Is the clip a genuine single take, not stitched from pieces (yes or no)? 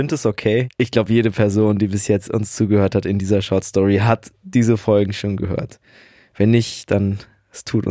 yes